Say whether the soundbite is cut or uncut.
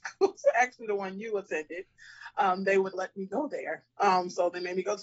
cut